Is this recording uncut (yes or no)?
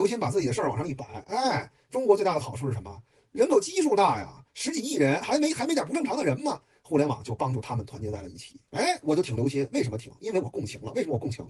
yes